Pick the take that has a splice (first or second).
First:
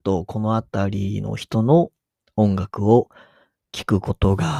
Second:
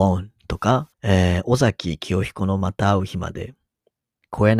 second